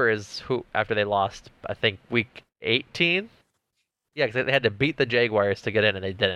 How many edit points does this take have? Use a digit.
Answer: 1